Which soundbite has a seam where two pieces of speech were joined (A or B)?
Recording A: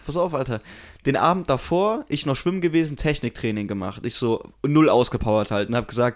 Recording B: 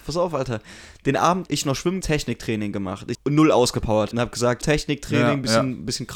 B